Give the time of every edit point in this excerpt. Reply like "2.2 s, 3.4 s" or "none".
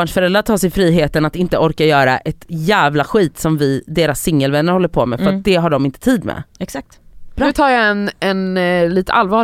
none